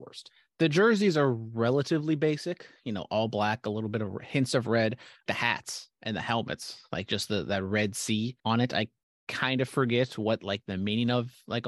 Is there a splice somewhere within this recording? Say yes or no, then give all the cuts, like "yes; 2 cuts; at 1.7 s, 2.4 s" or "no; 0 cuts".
yes; 2 cuts; at 5.3 s, 8.4 s